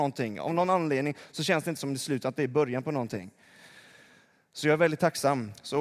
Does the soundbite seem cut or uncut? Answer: uncut